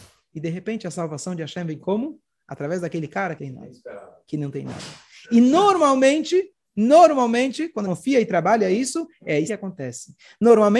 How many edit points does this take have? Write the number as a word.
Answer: three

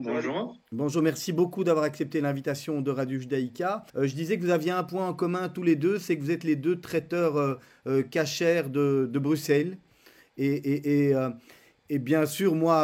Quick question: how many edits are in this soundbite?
one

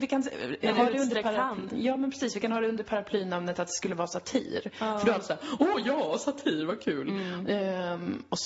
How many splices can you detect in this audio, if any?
zero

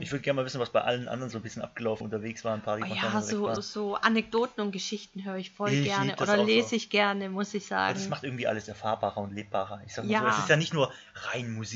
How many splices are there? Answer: two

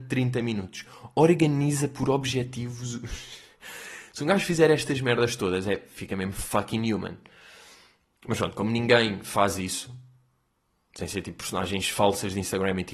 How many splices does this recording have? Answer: zero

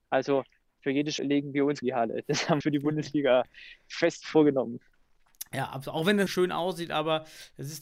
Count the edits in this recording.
four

